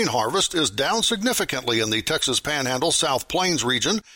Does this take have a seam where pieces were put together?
no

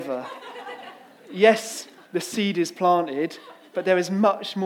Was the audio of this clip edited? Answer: no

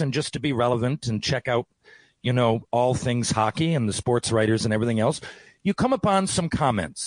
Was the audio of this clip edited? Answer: no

